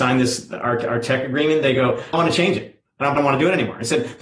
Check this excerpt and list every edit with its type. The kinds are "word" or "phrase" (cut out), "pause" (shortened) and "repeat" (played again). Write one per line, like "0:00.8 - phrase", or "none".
0:02.1 - word
0:03.2 - word

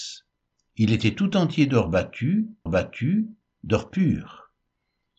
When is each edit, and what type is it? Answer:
0:02.7 - repeat

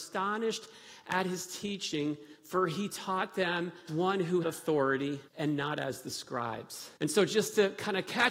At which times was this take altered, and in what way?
0:03.9 - word
0:04.4 - word
0:05.3 - pause
0:07.0 - pause

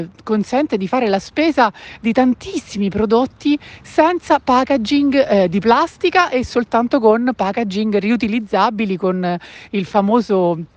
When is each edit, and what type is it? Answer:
none

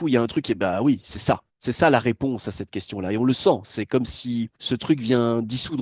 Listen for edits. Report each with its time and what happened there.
0:01.5 - pause
0:04.5 - pause

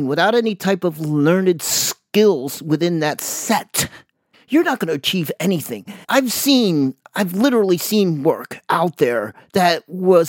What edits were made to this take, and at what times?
0:04.3 - pause
0:06.0 - pause

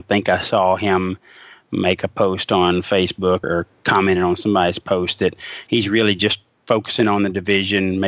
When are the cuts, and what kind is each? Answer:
0:03.4 - word

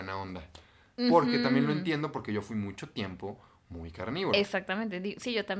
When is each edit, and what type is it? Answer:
none

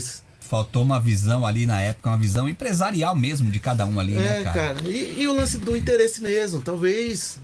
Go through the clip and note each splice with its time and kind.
0:05.6 - word

